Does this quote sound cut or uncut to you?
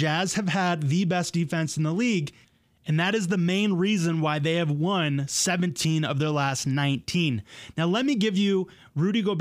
uncut